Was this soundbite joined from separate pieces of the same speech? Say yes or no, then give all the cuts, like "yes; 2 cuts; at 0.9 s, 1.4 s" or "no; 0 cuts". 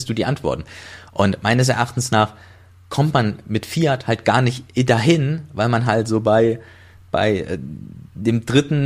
no; 0 cuts